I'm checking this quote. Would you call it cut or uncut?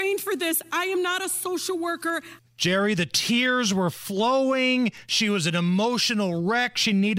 uncut